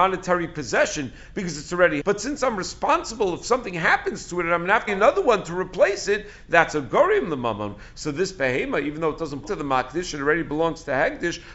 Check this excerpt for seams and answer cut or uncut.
cut